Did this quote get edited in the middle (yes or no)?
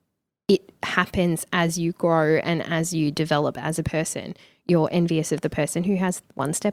no